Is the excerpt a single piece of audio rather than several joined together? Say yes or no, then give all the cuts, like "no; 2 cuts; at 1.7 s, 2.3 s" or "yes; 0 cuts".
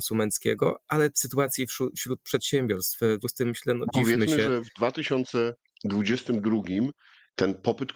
no; 3 cuts; at 1.1 s, 3.2 s, 3.9 s